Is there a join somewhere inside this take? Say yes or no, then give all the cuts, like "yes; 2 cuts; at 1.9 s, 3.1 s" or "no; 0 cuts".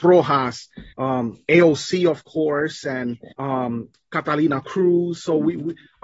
yes; 2 cuts; at 0.9 s, 3.3 s